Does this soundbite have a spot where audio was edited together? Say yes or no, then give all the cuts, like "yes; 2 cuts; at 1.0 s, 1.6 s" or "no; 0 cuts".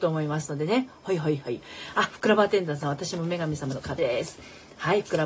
yes; 1 cut; at 4.0 s